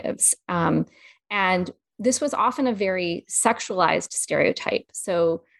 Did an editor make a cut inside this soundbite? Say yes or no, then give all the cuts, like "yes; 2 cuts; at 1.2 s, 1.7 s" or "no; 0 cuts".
no; 0 cuts